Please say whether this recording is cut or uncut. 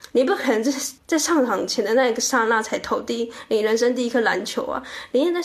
cut